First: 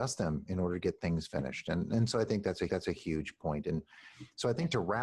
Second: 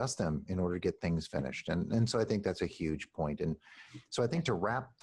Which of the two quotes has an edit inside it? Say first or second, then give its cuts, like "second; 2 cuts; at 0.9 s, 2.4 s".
first; 1 cut; at 2.7 s